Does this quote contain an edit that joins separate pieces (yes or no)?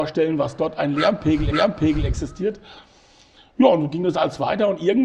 yes